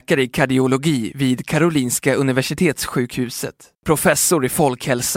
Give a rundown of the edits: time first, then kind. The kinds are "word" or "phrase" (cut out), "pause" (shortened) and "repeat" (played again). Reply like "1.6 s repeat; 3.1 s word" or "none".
3.7 s pause